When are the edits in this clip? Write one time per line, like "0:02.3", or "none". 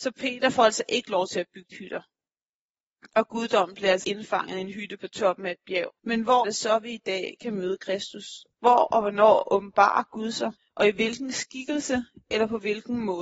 0:01.7
0:04.0
0:06.0
0:06.4
0:08.5
0:10.6